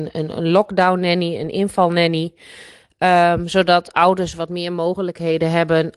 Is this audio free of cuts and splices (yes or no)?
yes